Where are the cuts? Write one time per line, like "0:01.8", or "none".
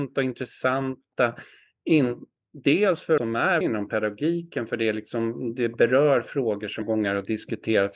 0:03.2
0:03.6
0:06.8